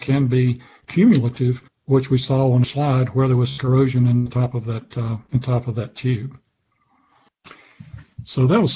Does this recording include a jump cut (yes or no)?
yes